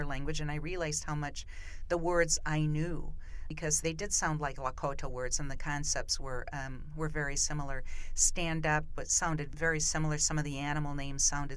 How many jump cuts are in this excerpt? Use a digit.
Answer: 0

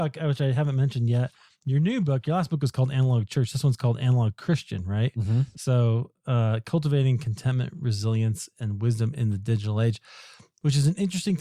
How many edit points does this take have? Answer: 0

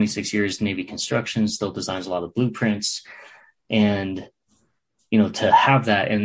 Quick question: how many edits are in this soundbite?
0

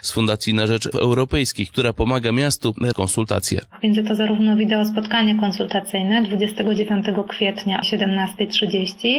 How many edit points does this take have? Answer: 3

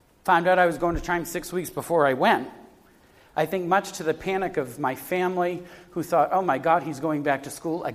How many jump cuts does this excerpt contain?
0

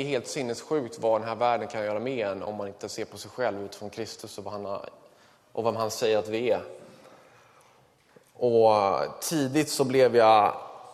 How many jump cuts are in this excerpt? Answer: 0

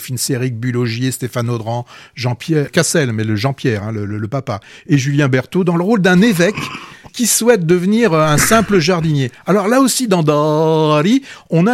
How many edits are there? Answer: 2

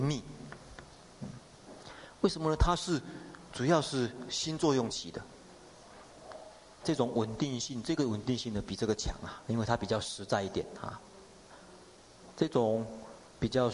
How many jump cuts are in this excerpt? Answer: 1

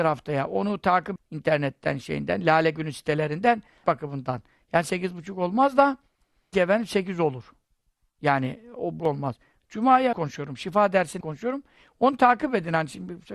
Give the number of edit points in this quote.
6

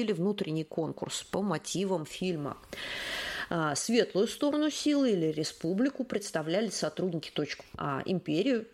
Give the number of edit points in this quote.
1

